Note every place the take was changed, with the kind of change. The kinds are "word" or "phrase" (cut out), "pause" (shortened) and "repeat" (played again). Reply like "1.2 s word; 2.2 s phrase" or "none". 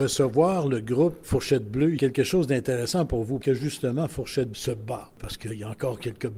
1.2 s word; 2.0 s phrase; 3.4 s word; 4.5 s word